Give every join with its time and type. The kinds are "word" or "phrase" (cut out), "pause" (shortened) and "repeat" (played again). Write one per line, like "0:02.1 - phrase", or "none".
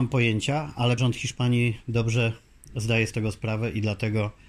0:01.0 - word
0:03.1 - word